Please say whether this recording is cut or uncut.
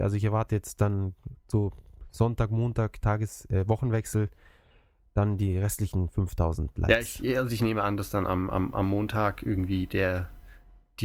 uncut